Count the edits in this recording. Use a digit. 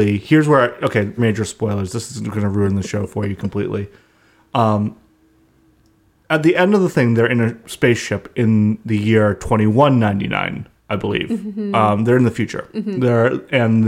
2